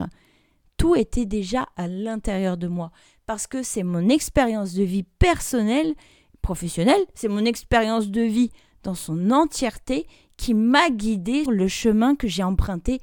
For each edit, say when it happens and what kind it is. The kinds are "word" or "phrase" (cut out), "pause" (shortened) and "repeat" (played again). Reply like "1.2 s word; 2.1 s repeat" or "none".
11.5 s word